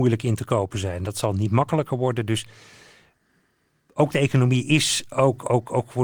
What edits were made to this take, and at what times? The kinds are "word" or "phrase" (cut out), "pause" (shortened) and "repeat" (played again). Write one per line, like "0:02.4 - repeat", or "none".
none